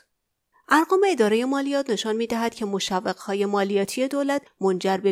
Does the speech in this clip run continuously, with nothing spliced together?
yes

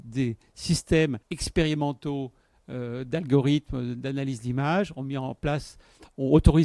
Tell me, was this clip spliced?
yes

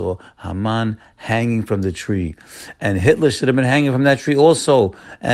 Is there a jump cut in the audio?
no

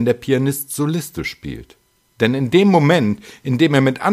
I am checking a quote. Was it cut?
no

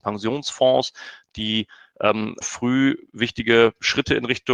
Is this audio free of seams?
no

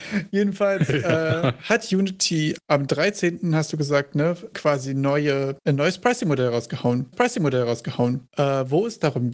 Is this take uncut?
no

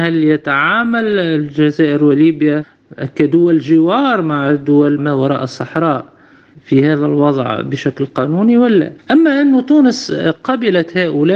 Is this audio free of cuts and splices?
no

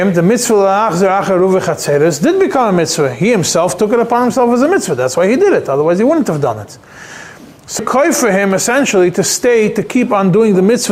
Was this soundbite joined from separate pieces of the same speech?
yes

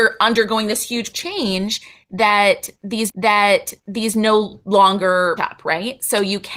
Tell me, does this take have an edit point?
yes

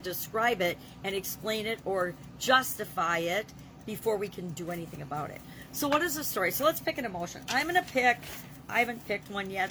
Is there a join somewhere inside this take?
no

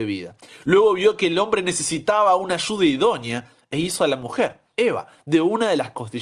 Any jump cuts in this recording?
no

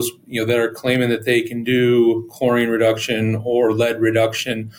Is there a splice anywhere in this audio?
no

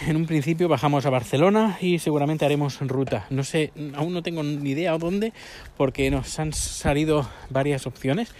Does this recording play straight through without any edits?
yes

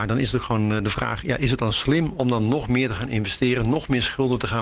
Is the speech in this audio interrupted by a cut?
no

